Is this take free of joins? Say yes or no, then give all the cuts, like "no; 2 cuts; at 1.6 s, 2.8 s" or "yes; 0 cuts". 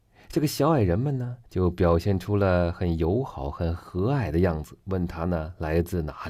no; 1 cut; at 1.5 s